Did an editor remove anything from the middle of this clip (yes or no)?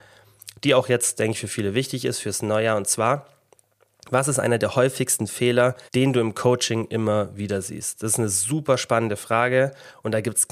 yes